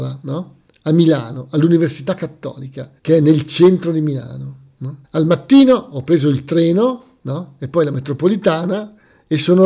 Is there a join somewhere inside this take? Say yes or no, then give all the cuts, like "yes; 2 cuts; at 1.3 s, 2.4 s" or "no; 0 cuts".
yes; 2 cuts; at 3.0 s, 5.0 s